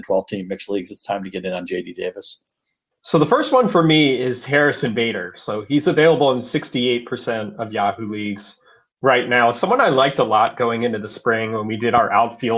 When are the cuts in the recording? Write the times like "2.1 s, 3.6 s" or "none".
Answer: none